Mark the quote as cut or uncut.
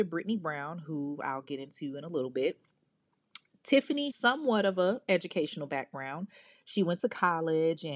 cut